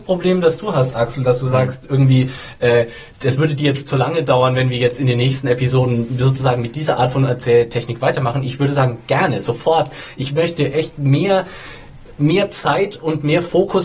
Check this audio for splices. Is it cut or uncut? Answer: cut